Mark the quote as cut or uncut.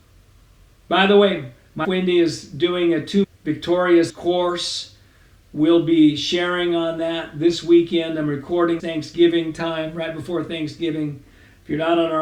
cut